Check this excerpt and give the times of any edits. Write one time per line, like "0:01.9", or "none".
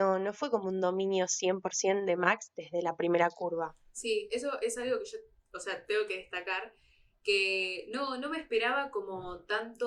none